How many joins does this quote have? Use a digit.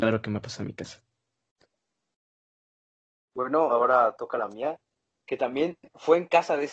0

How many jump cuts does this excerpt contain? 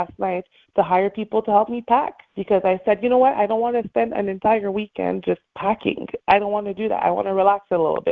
1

